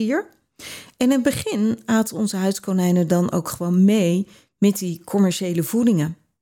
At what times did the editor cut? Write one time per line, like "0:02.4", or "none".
none